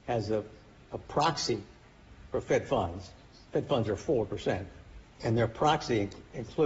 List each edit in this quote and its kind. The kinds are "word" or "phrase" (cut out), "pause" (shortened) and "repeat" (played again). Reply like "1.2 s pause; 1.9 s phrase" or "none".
5.1 s pause

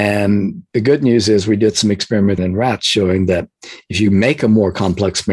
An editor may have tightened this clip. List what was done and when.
2.4 s word

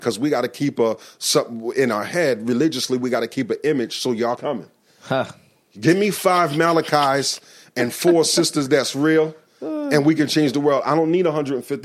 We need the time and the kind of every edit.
4.4 s word

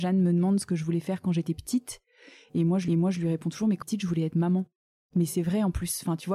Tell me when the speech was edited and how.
2.9 s repeat; 3.8 s word

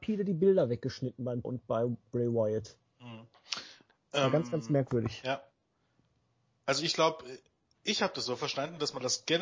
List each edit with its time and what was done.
1.4 s word

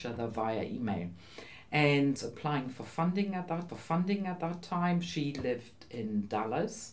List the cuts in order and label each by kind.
2.2 s phrase; 3.7 s repeat

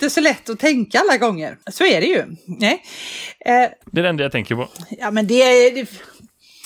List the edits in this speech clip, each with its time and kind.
1.6 s pause; 3.8 s pause

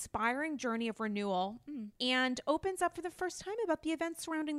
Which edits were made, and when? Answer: 2.0 s pause

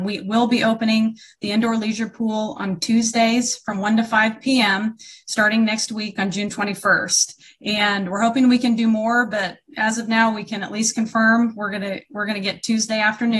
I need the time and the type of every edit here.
none

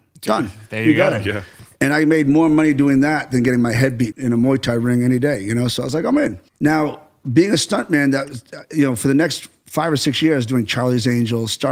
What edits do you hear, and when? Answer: 4.1 s word; 6.5 s pause

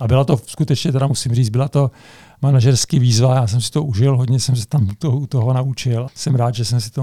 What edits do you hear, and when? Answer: 6.1 s word

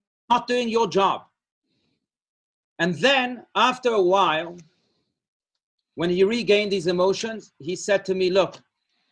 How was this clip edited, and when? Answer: none

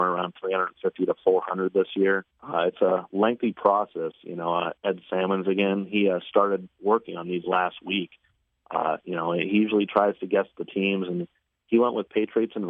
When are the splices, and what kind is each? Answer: 2.3 s pause; 4.8 s pause

